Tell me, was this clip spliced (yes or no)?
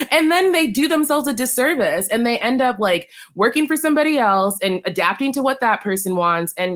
no